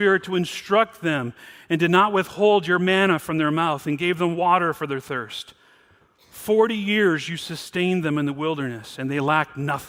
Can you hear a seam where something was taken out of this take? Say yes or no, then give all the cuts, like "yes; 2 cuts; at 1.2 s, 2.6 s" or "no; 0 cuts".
no; 0 cuts